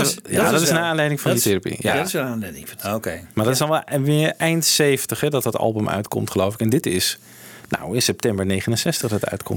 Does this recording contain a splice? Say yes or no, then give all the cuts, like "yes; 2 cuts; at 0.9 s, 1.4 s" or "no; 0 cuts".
no; 0 cuts